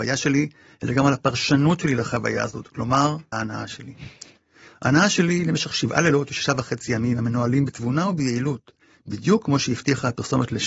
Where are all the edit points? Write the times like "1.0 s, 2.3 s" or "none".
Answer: 3.3 s

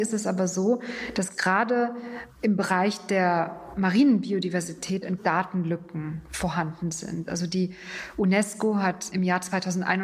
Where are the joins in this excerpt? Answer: 5.2 s

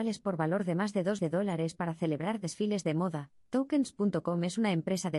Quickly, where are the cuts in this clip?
1.2 s

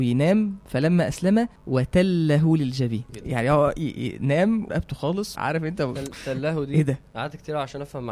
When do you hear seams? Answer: 1.6 s, 3.1 s, 4.7 s, 5.4 s, 6.0 s

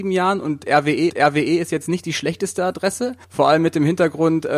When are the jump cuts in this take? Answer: 1.1 s, 3.2 s

